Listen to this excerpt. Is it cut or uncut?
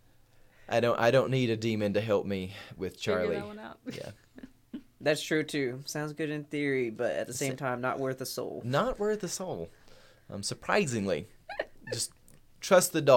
uncut